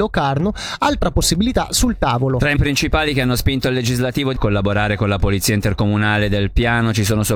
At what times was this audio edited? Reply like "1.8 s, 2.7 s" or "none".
2.6 s, 4.4 s